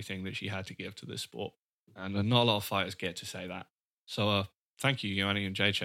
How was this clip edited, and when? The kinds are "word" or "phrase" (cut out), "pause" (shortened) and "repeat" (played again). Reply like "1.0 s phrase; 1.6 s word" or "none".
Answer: none